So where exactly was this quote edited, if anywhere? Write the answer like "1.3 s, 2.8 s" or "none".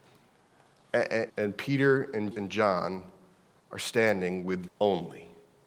1.3 s, 2.3 s, 4.7 s